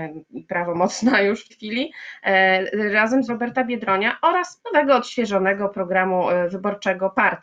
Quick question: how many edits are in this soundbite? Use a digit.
3